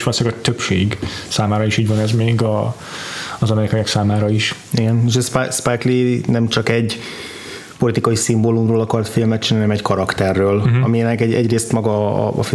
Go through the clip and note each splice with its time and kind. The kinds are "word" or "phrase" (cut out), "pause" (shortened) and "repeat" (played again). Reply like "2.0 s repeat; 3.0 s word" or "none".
none